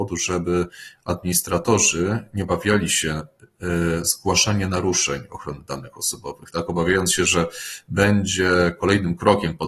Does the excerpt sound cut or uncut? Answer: uncut